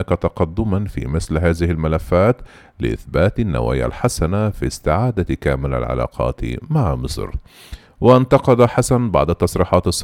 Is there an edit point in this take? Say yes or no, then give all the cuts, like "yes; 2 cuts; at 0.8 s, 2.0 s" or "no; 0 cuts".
no; 0 cuts